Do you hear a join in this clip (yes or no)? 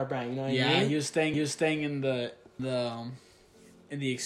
yes